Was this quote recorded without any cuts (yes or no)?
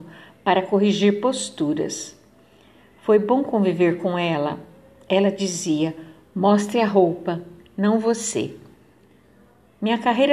yes